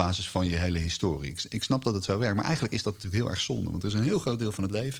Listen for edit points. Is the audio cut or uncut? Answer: uncut